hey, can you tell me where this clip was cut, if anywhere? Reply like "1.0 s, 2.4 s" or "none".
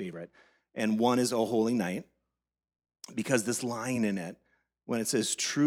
none